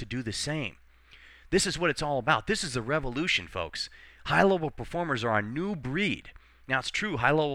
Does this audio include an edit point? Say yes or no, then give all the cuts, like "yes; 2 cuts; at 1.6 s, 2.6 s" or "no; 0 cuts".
no; 0 cuts